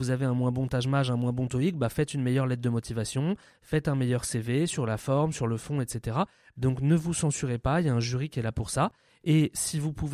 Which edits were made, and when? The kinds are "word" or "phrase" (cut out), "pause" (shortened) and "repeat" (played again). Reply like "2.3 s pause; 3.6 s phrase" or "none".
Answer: none